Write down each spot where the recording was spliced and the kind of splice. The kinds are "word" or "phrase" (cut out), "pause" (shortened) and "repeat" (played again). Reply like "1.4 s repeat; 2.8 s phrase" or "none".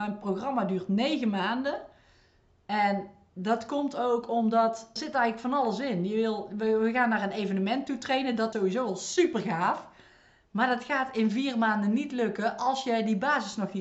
5.0 s word; 8.5 s word